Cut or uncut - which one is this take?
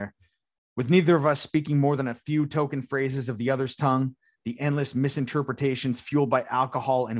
uncut